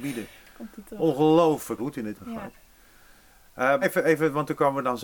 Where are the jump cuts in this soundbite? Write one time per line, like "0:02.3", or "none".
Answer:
0:01.8
0:02.1
0:03.8

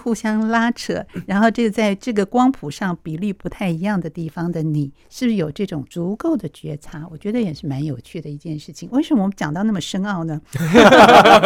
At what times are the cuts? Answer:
0:05.0

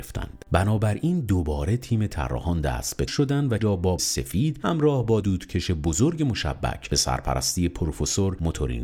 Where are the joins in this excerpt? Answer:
0:03.1
0:03.6
0:04.0
0:05.2

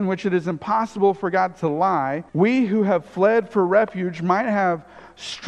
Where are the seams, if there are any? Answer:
0:02.3

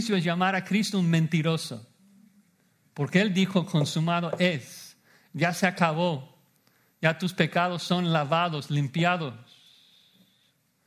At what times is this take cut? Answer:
none

